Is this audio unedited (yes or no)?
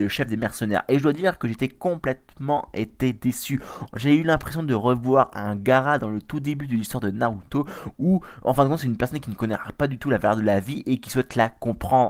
yes